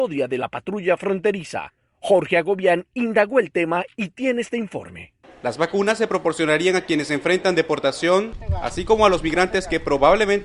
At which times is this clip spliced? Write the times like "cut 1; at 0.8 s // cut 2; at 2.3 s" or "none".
none